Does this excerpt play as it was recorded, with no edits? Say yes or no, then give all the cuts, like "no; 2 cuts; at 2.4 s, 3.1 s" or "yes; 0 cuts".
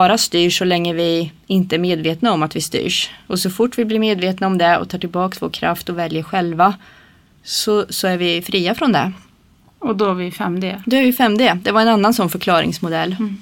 yes; 0 cuts